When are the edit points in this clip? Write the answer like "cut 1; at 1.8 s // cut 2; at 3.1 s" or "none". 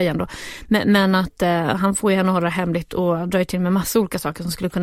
none